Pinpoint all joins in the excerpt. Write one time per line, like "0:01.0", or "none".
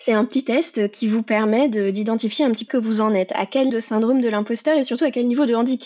0:02.7
0:03.7